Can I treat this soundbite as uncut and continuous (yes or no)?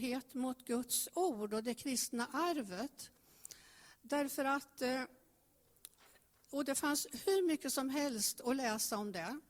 yes